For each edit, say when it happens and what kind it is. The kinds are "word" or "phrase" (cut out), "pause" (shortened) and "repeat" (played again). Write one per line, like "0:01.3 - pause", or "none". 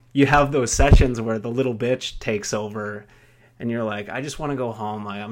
none